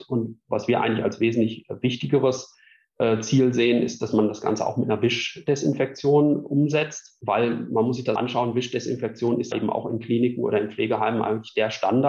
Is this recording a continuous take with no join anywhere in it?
no; 2 cuts; at 8.2 s, 9.5 s

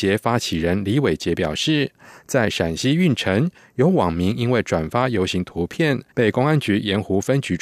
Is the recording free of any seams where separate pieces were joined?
no; 1 cut; at 6.1 s

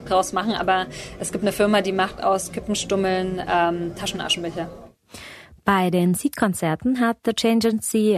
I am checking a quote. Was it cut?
no; 0 cuts

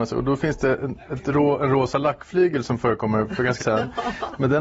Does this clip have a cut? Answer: yes; 1 cut; at 3.6 s

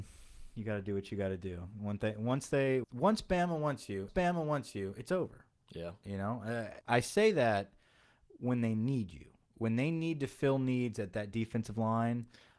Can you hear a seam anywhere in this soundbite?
yes; 3 cuts; at 2.8 s, 4.1 s, 6.8 s

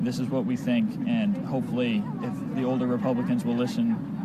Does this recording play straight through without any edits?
yes; 0 cuts

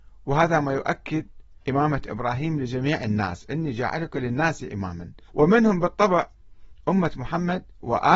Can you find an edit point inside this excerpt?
yes; 2 cuts; at 1.6 s, 5.3 s

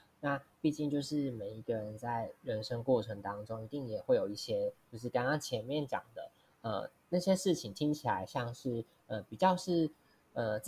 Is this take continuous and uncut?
yes; 0 cuts

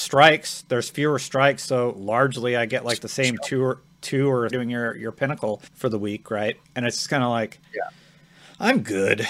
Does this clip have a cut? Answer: yes; 3 cuts; at 4.5 s, 5.7 s, 6.6 s

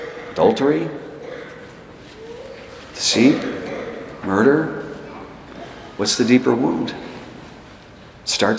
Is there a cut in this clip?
no; 0 cuts

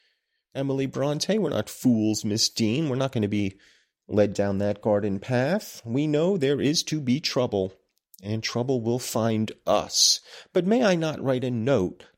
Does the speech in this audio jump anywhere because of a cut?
no; 0 cuts

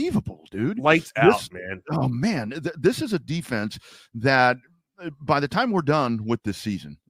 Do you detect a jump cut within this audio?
no; 0 cuts

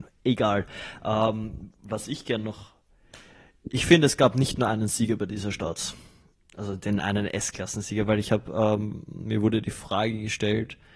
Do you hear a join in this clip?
no; 0 cuts

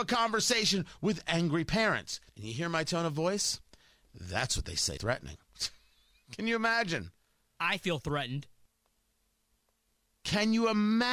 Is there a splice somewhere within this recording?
yes; 2 cuts; at 2.3 s, 5.0 s

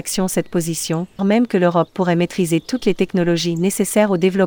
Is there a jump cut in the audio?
yes; 1 cut; at 1.2 s

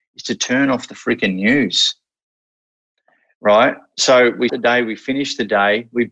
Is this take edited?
yes; 1 cut; at 4.5 s

